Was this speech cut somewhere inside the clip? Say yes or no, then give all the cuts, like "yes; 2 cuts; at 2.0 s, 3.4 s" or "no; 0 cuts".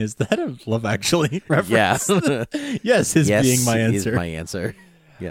no; 0 cuts